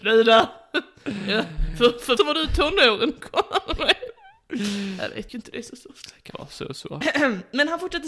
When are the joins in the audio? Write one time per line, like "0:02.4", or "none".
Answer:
0:02.2
0:05.3
0:06.3